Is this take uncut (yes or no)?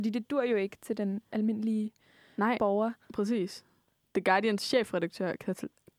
yes